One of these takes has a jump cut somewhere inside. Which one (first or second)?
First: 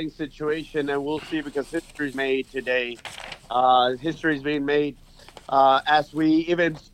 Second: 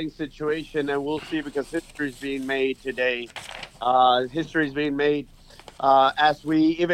first